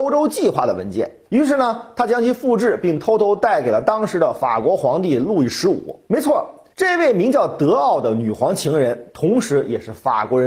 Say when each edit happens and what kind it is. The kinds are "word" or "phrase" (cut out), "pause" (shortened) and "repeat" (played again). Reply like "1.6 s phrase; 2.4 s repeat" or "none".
1.2 s pause; 6.1 s pause; 6.7 s pause